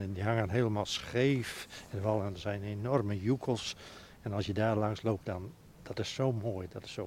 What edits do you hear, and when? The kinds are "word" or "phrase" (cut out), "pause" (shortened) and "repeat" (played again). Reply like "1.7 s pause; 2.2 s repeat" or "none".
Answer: none

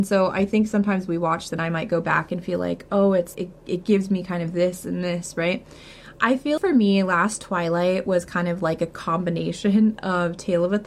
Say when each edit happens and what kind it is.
1.5 s word; 3.3 s word; 6.6 s word

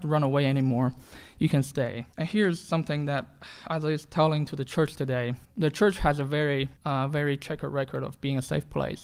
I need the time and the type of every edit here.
2.1 s pause; 5.4 s pause; 6.8 s pause

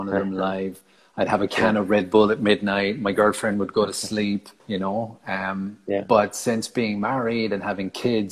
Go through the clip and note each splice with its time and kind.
4.6 s pause

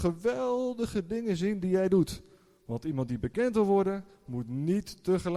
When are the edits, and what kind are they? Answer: none

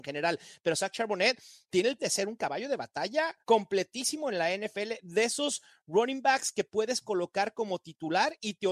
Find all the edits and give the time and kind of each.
2.0 s word; 3.4 s pause

